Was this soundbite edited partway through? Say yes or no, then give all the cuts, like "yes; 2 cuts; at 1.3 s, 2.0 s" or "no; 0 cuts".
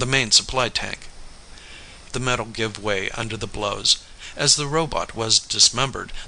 yes; 1 cut; at 2.1 s